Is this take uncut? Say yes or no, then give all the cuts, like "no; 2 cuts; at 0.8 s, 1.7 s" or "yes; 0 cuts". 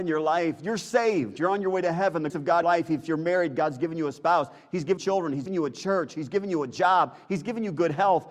no; 4 cuts; at 2.3 s, 2.6 s, 5.0 s, 5.5 s